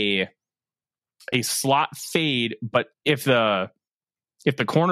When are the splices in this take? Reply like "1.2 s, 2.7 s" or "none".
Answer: 2.9 s